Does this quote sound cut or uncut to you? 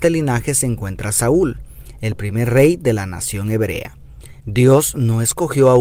uncut